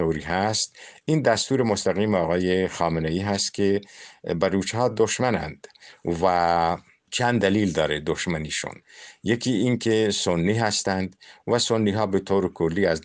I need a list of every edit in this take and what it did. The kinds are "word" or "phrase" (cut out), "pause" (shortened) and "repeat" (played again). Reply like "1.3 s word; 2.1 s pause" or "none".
none